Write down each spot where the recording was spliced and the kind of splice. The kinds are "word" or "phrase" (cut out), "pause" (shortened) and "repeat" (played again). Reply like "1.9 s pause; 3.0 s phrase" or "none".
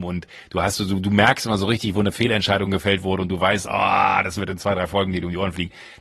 none